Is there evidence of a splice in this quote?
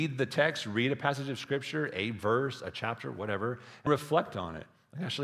yes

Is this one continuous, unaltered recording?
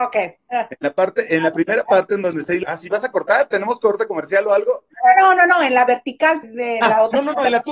no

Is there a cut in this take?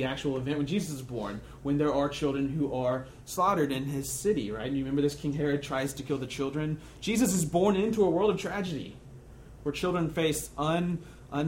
no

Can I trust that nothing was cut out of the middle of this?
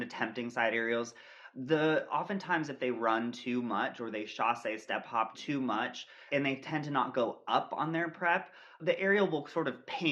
no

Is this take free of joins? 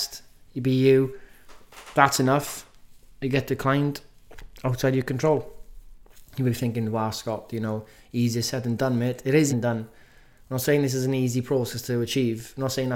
no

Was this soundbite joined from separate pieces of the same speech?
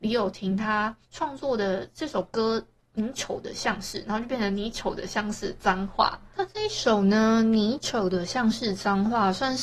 yes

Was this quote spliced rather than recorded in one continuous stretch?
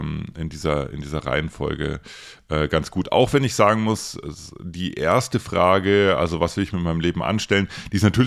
no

